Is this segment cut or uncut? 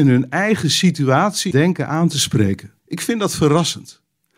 cut